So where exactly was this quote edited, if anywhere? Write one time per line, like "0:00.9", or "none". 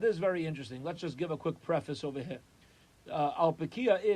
none